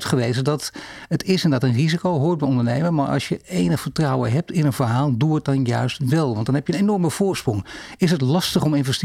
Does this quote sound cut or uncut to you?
uncut